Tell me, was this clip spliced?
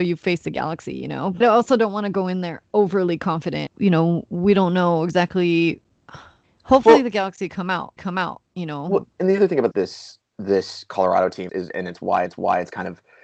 yes; 7 cuts; at 1.4 s, 3.7 s, 6.4 s, 8.0 s, 9.7 s, 11.5 s, 12.3 s

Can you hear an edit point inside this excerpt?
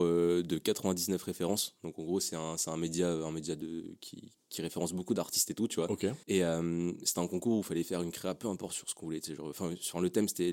yes; 1 cut; at 6.2 s

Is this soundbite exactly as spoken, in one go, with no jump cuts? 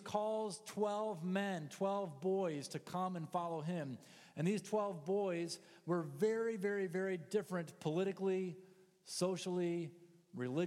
yes; 0 cuts

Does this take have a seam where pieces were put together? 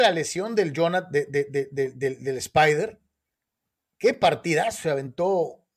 no; 0 cuts

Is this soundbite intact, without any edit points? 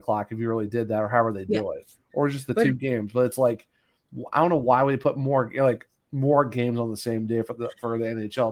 yes; 0 cuts

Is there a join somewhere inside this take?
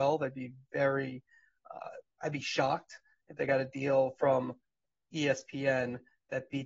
no; 0 cuts

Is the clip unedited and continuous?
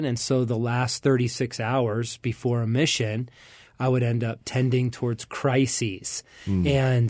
yes; 0 cuts

